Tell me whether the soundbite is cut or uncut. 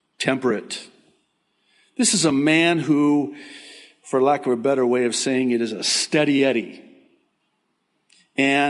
uncut